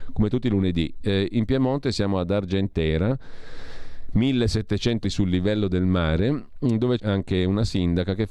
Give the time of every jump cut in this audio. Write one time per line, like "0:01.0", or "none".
0:05.0
0:07.0